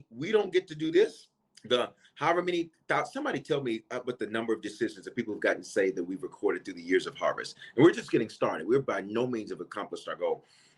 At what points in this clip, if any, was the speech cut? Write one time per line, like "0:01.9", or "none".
0:01.4